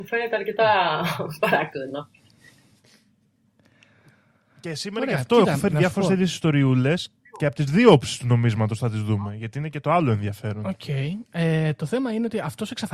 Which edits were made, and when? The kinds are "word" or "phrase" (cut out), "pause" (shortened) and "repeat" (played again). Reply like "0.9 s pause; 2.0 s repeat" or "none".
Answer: 7.3 s pause